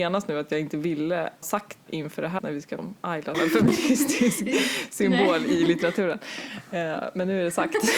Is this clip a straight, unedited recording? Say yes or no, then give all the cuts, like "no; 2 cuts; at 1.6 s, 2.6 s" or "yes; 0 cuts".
no; 5 cuts; at 1.4 s, 1.9 s, 2.4 s, 2.8 s, 3.3 s